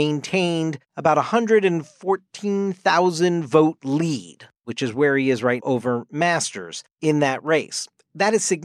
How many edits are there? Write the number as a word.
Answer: one